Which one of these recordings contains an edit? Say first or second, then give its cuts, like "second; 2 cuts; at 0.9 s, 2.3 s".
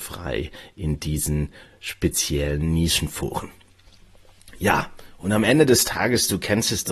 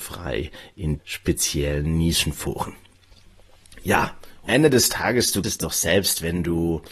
second; 3 cuts; at 1.0 s, 4.5 s, 5.4 s